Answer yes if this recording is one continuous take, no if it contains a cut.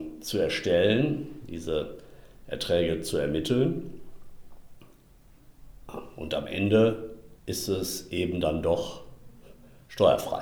no